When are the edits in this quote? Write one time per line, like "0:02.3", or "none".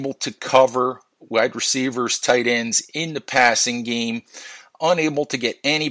none